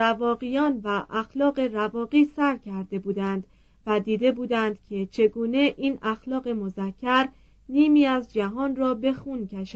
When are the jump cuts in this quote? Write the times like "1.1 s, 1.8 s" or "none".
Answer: none